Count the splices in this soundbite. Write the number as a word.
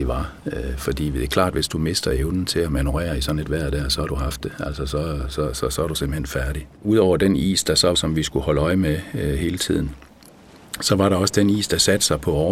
two